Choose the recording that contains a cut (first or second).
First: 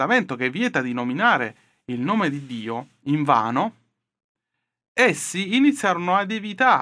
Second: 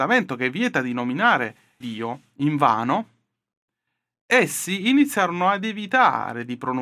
second